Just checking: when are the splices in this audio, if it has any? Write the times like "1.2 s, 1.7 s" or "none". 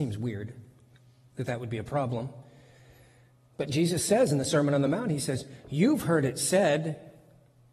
none